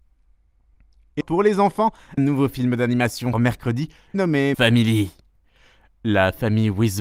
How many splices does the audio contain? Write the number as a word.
five